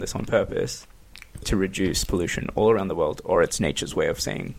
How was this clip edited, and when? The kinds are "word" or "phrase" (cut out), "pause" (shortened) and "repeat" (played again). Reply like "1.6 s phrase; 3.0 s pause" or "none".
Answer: none